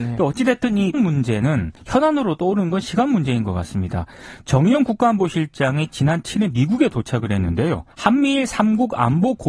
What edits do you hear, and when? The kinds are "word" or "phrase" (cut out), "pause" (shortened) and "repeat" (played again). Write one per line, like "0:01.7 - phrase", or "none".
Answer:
0:00.9 - word
0:01.8 - pause
0:07.9 - pause